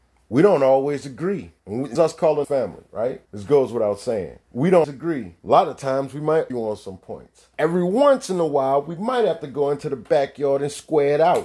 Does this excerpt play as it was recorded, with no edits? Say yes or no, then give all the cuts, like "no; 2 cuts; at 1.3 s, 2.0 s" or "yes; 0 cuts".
no; 9 cuts; at 1.6 s, 2.0 s, 2.4 s, 3.3 s, 4.4 s, 4.8 s, 5.4 s, 6.5 s, 7.5 s